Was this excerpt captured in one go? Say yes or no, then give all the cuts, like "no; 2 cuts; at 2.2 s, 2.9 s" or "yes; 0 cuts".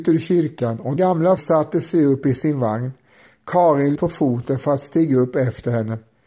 no; 3 cuts; at 1.0 s, 1.4 s, 4.0 s